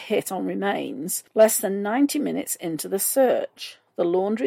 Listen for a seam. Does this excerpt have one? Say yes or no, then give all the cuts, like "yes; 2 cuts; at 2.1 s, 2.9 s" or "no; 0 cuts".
yes; 1 cut; at 1.3 s